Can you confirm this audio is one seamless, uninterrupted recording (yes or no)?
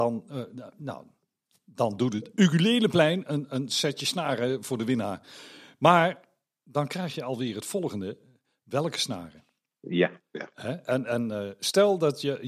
yes